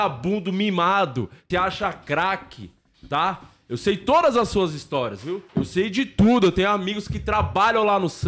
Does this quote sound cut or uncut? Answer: cut